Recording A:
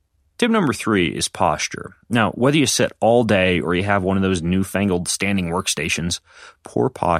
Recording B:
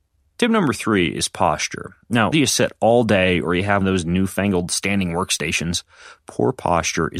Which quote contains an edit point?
B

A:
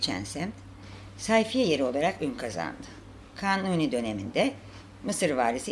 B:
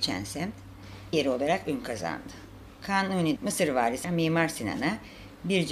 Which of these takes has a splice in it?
B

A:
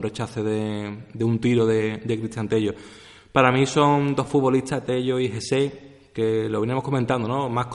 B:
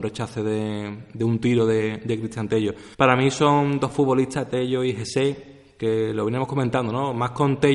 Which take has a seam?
B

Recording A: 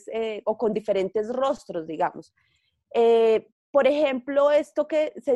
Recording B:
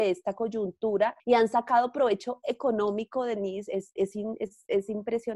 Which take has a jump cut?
B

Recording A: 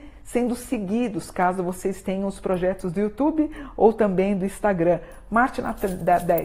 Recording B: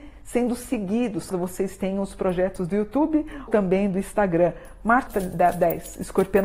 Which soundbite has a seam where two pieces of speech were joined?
B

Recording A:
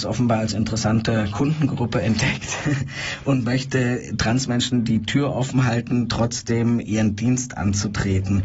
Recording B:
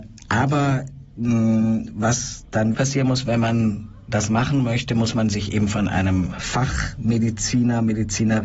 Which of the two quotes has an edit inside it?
B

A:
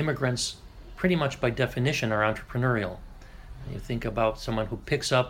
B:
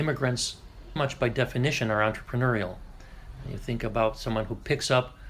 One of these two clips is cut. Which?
B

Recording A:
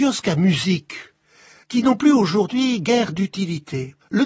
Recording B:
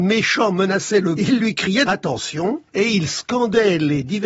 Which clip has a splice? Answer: B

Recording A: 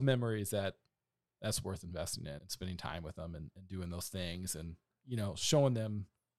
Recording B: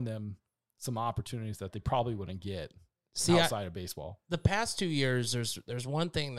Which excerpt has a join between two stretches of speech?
A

